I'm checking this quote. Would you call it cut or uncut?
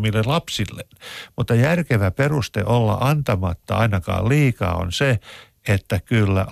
uncut